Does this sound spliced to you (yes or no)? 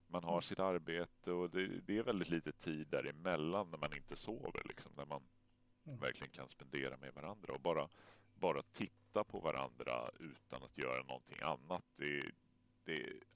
no